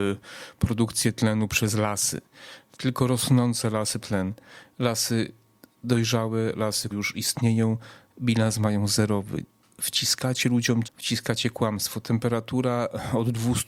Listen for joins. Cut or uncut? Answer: cut